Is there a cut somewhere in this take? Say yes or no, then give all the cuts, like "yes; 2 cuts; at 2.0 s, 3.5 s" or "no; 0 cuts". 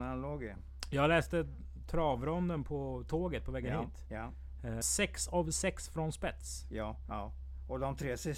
yes; 1 cut; at 4.8 s